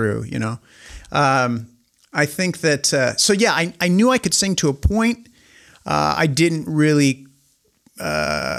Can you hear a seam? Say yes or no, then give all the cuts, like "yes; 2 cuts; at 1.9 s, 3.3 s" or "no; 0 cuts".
no; 0 cuts